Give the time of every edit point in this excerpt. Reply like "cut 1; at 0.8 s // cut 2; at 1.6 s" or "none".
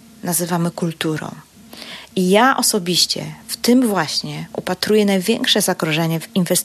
none